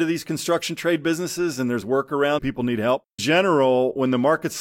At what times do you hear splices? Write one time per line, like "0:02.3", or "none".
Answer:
0:01.8
0:02.4
0:03.2